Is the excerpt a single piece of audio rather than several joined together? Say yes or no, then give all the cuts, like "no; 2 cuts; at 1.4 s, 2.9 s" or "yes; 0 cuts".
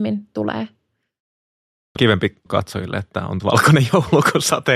no; 3 cuts; at 2.0 s, 2.5 s, 3.4 s